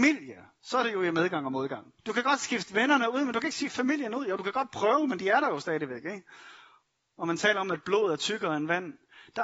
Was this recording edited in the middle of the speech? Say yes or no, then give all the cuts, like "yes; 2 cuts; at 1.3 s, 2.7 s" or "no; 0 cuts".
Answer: yes; 1 cut; at 2.0 s